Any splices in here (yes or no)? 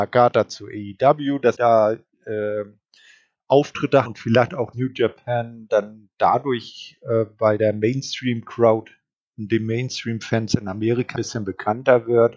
yes